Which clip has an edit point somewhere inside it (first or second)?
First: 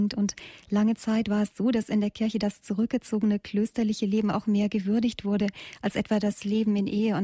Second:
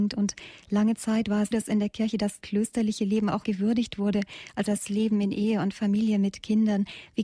second